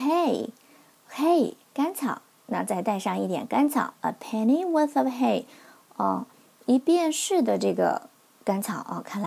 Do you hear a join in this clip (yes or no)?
no